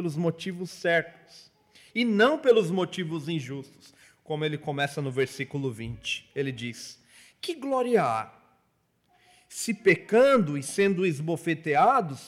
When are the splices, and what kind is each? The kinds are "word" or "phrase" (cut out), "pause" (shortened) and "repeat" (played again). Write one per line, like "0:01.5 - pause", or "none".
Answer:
none

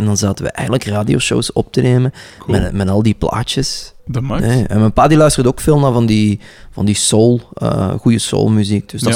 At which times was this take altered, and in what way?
0:04.0 - pause

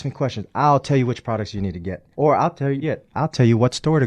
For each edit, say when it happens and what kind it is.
0:02.1 - pause
0:02.8 - word

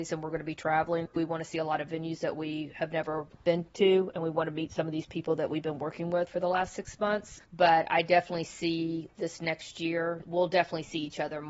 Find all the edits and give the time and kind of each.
0:07.4 - pause

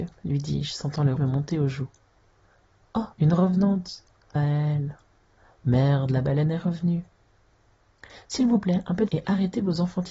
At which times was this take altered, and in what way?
0:01.2 - word
0:03.1 - pause
0:04.4 - phrase
0:09.1 - word

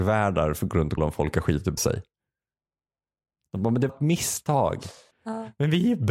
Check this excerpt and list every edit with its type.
0:01.0 - word
0:01.8 - word
0:03.9 - word
0:05.1 - pause

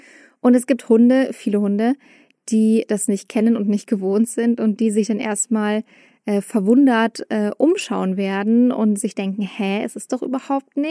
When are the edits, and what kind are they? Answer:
none

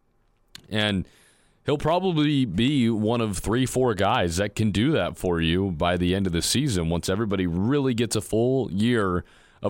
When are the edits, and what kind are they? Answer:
none

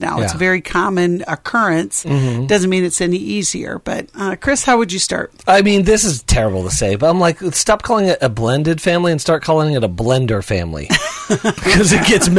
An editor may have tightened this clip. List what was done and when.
none

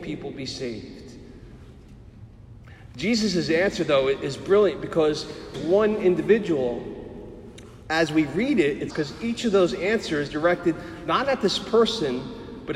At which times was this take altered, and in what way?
0:05.5 - phrase
0:08.9 - phrase
0:10.3 - word

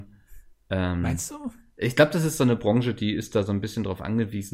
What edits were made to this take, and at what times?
none

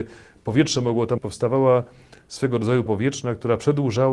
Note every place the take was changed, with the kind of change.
0:01.2 - word
0:02.9 - word

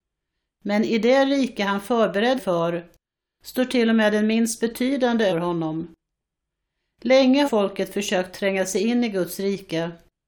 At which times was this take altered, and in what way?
0:02.4 - word
0:05.3 - word
0:07.4 - word

